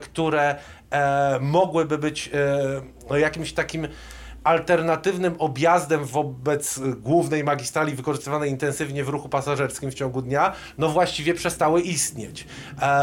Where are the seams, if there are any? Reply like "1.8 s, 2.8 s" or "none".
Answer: none